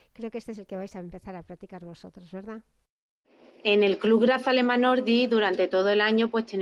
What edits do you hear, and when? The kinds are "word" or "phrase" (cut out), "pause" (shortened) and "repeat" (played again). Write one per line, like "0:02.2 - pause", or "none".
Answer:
none